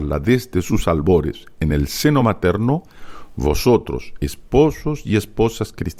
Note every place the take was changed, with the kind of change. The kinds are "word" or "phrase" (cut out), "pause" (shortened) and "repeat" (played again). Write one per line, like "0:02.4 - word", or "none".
none